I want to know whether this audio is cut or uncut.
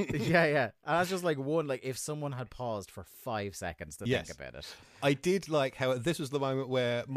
uncut